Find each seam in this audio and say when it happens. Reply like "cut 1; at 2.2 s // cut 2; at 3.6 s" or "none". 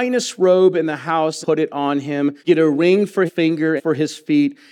cut 1; at 1.4 s // cut 2; at 2.4 s // cut 3; at 3.3 s // cut 4; at 3.8 s